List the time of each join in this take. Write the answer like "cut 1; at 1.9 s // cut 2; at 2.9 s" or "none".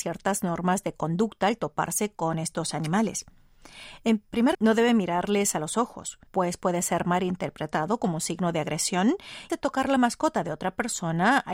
cut 1; at 4.5 s // cut 2; at 6.3 s // cut 3; at 9.5 s